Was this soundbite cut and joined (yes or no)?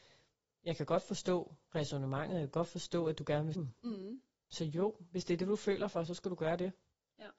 yes